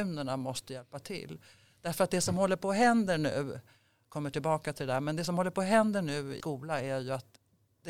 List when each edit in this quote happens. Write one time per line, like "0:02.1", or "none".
0:06.4